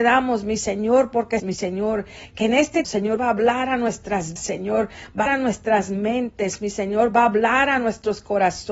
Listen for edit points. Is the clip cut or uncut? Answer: cut